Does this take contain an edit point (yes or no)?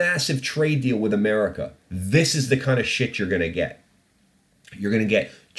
no